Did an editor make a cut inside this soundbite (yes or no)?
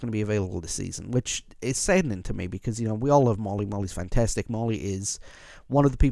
no